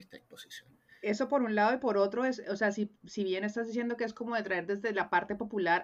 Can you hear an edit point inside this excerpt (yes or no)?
no